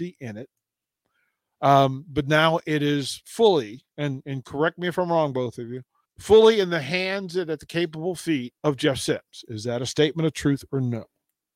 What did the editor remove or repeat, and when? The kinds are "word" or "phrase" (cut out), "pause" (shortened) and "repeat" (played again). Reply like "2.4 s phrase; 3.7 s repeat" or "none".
3.9 s pause; 6.0 s pause; 8.6 s pause